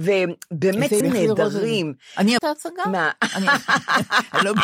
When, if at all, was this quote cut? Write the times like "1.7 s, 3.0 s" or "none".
1.0 s, 2.4 s

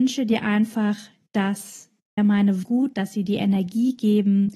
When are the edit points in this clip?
2.2 s, 2.6 s, 2.9 s

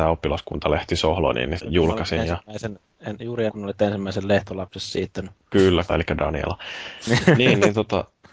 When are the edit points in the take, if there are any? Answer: 1.6 s, 3.5 s, 5.9 s

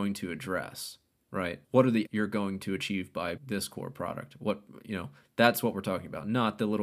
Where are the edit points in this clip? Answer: 2.1 s, 3.4 s

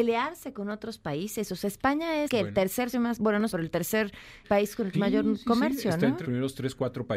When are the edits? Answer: 2.3 s, 2.9 s, 3.5 s, 4.4 s, 4.9 s, 6.2 s

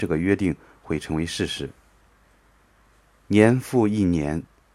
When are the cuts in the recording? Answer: none

